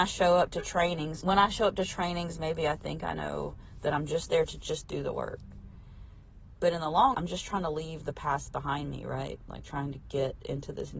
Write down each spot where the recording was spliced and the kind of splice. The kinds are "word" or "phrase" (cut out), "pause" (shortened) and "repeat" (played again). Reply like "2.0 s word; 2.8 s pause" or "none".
1.2 s word; 7.1 s word